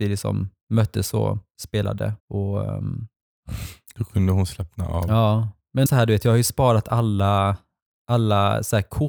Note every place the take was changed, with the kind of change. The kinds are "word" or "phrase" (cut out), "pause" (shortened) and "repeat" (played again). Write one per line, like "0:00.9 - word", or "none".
0:02.2 - pause
0:05.9 - word